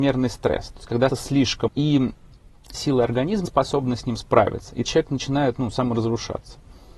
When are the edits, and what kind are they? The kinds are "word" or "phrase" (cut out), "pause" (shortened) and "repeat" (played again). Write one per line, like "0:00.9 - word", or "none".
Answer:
0:01.1 - word
0:01.7 - word
0:02.7 - word
0:03.5 - word
0:04.8 - word